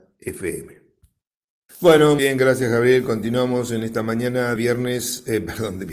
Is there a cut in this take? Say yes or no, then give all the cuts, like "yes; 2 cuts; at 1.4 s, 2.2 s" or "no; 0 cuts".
yes; 2 cuts; at 2.2 s, 4.6 s